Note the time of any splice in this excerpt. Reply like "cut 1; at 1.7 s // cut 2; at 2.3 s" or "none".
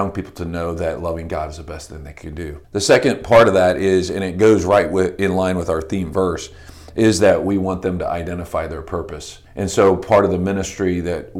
cut 1; at 2.6 s // cut 2; at 9.5 s